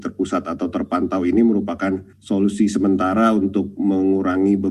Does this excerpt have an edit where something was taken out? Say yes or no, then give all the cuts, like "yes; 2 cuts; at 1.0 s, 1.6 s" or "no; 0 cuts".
no; 0 cuts